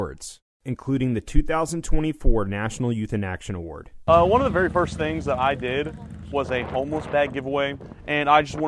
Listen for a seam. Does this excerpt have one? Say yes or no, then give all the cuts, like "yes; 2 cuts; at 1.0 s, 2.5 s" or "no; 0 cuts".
no; 0 cuts